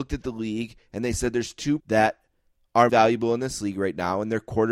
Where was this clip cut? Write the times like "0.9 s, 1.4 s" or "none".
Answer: 1.8 s, 2.9 s